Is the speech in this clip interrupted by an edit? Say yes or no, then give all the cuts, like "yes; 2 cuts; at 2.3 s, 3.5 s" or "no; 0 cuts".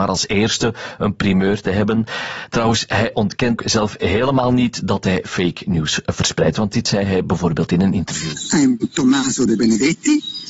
yes; 1 cut; at 3.6 s